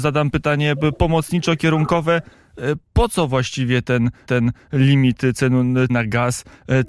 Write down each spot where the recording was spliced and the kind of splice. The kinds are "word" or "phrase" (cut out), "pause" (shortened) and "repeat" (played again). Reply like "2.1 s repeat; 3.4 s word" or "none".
4.3 s repeat; 5.9 s word